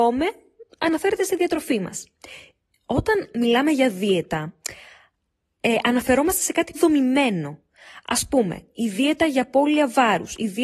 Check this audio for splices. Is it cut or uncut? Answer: cut